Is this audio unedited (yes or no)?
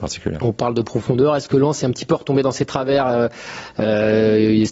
yes